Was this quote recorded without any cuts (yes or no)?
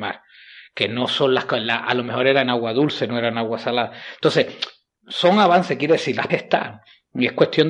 no